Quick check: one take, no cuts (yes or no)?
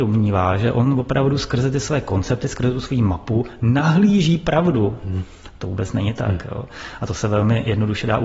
yes